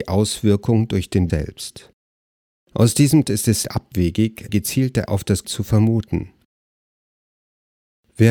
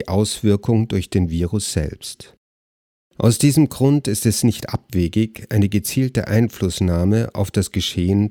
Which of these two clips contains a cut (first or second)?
first